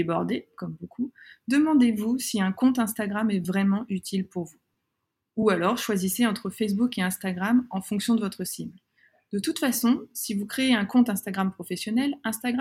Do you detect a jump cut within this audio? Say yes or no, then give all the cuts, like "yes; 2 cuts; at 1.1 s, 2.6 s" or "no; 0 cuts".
no; 0 cuts